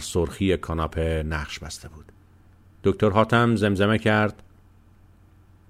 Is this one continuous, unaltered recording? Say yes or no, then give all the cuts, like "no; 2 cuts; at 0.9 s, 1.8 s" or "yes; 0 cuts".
yes; 0 cuts